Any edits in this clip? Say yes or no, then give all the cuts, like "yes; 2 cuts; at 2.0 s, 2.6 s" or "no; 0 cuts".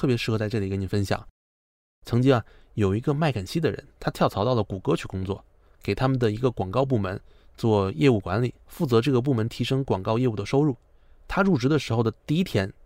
yes; 2 cuts; at 4.0 s, 8.6 s